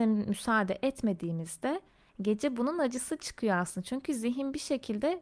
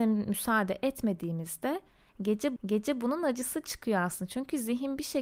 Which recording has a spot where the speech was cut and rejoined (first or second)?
second